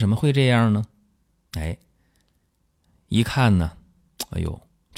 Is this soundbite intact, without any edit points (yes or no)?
yes